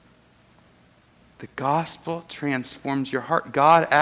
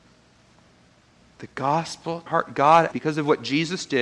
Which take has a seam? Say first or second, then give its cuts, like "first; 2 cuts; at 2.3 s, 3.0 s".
second; 2 cuts; at 2.3 s, 2.9 s